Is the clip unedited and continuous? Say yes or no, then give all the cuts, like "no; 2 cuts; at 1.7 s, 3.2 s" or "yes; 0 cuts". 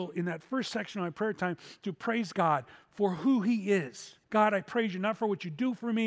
no; 1 cut; at 4.2 s